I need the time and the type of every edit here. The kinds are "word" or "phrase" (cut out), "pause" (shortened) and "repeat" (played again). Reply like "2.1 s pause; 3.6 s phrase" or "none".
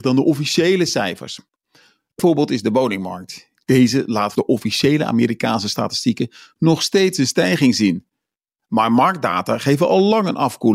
2.2 s word; 4.4 s word